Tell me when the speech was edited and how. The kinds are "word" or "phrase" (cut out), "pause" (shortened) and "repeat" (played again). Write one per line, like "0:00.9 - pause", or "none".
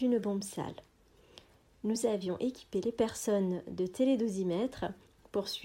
none